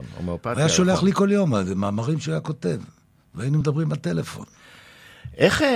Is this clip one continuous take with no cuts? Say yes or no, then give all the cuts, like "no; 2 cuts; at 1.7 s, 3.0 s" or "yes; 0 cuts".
yes; 0 cuts